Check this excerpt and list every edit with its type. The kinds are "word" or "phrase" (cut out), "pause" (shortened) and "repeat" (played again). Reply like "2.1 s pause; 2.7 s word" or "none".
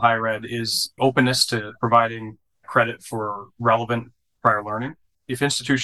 1.0 s word